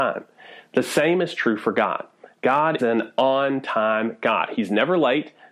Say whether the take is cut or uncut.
cut